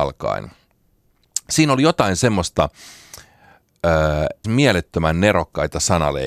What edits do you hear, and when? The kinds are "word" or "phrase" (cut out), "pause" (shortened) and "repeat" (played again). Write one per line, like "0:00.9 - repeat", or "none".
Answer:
0:04.4 - phrase